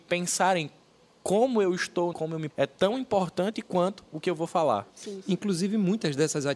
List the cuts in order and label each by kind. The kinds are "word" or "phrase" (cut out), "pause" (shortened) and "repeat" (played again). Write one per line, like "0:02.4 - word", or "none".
0:02.1 - phrase
0:02.5 - word
0:04.9 - pause